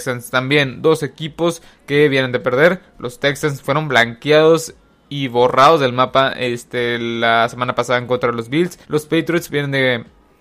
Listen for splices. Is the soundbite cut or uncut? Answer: cut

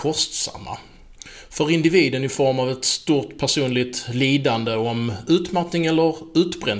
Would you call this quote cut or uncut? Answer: uncut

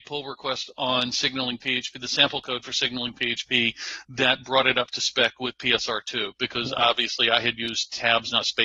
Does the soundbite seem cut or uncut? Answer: uncut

